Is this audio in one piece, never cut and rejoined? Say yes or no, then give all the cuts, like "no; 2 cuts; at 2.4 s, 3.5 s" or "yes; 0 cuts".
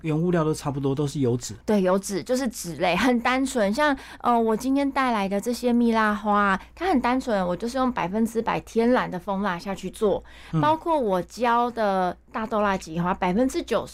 no; 1 cut; at 1.6 s